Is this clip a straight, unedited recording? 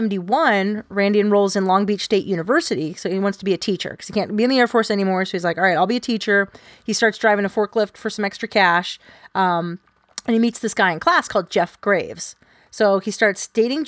yes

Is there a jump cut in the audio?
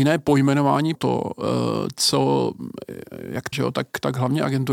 yes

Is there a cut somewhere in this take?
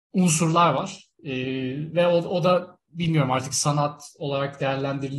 no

